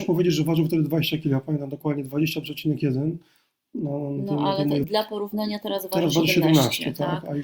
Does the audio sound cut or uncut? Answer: cut